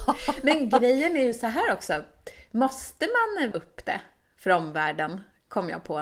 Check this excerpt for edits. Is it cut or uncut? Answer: cut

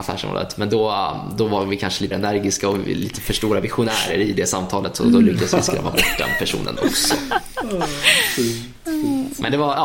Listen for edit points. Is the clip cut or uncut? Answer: cut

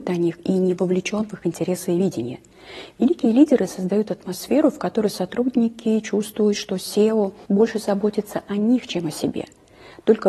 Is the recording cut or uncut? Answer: cut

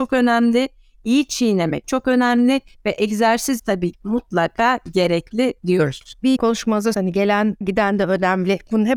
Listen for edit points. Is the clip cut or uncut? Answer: cut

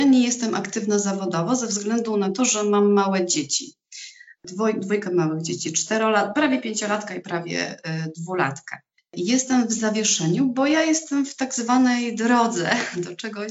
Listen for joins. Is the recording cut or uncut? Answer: uncut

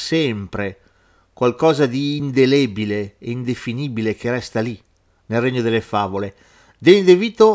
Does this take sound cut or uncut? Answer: uncut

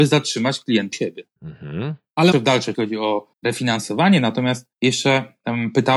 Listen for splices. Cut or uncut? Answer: cut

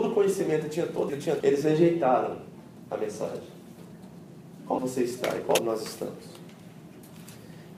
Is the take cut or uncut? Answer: cut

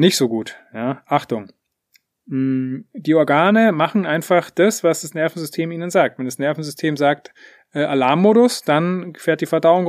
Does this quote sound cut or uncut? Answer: uncut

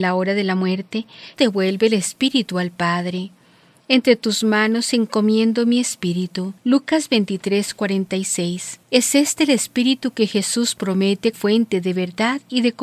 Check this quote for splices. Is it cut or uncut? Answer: cut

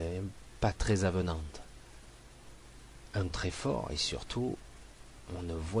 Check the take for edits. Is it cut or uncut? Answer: cut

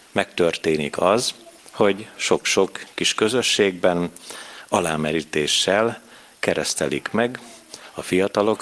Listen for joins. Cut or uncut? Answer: uncut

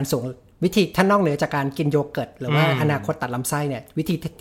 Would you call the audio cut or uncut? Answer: uncut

